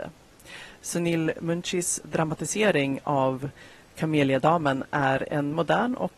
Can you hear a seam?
no; 0 cuts

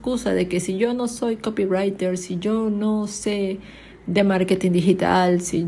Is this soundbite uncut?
yes; 0 cuts

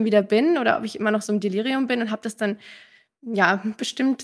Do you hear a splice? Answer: no; 0 cuts

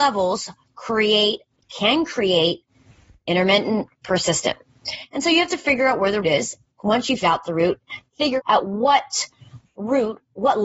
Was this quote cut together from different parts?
yes; 5 cuts; at 3.2 s, 6.2 s, 6.7 s, 7.2 s, 8.4 s

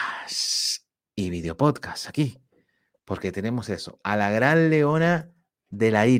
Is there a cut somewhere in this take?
no; 0 cuts

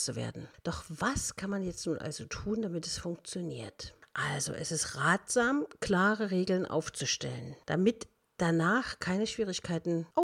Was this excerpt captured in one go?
yes; 0 cuts

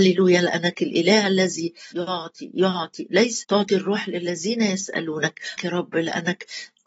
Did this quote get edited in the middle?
yes; 3 cuts; at 1.9 s, 3.4 s, 5.6 s

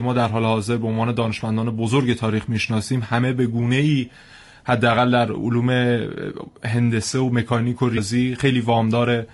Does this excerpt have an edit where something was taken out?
no; 0 cuts

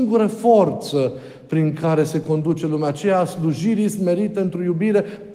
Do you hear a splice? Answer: no; 0 cuts

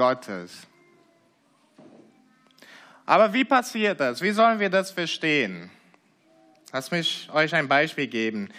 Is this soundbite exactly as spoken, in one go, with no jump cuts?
yes; 0 cuts

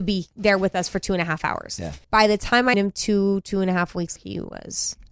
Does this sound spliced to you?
yes; 3 cuts; at 2.0 s, 2.7 s, 4.2 s

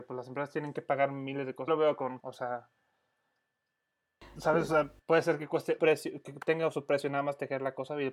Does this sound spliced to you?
yes; 4 cuts; at 1.7 s, 2.2 s, 5.0 s, 5.8 s

